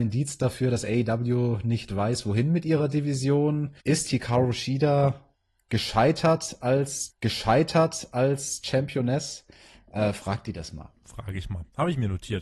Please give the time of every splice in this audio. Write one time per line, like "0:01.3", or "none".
0:03.8
0:07.1